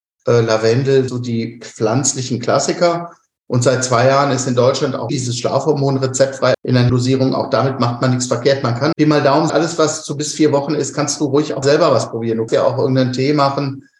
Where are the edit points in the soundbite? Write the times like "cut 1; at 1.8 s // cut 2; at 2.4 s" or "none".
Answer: cut 1; at 1.1 s // cut 2; at 5.1 s // cut 3; at 6.5 s // cut 4; at 6.9 s // cut 5; at 8.9 s // cut 6; at 9.5 s // cut 7; at 11.6 s // cut 8; at 12.5 s